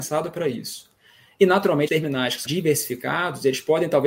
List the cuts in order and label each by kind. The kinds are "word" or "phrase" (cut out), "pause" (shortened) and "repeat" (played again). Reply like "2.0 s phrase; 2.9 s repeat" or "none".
1.9 s word; 2.5 s word